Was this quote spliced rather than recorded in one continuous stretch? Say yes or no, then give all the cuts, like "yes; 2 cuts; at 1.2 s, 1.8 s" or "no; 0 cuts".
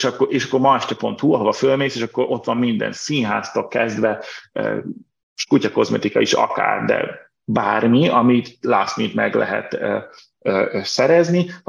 no; 0 cuts